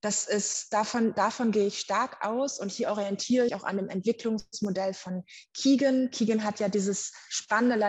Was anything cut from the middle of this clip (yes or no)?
yes